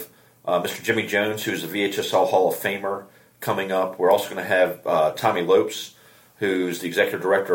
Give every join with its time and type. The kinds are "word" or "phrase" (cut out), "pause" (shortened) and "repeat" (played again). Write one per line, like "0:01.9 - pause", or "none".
none